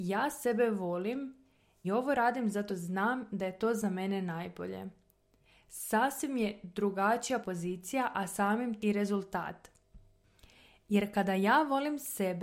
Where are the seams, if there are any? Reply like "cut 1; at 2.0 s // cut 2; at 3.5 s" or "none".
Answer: cut 1; at 1.8 s // cut 2; at 2.7 s // cut 3; at 7.4 s // cut 4; at 8.8 s